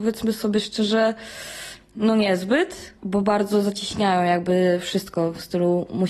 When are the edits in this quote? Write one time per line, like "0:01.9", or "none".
0:03.0